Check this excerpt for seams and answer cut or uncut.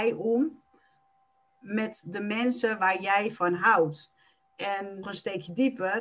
cut